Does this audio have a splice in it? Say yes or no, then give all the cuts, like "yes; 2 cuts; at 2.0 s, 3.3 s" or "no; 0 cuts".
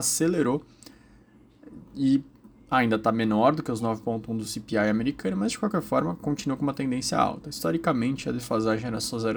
no; 0 cuts